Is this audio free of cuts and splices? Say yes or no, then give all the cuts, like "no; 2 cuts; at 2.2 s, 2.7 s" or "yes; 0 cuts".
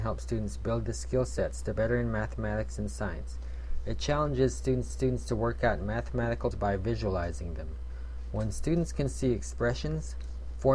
no; 3 cuts; at 1.8 s, 4.9 s, 6.5 s